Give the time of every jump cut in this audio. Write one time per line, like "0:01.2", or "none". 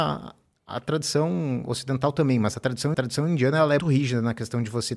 0:02.9
0:03.8